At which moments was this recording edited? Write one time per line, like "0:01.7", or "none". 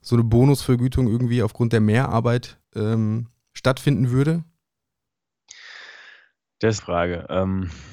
0:02.6
0:06.8